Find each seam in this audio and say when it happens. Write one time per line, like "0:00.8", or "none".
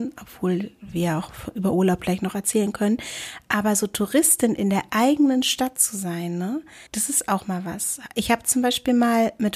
0:06.9